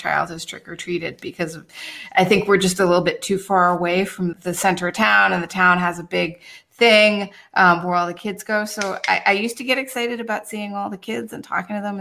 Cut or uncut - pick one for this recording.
cut